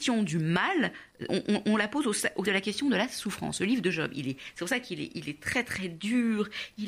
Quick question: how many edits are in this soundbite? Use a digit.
2